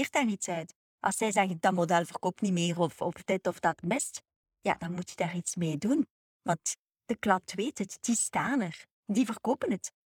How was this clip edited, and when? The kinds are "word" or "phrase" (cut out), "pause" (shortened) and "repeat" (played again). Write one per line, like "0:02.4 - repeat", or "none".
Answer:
none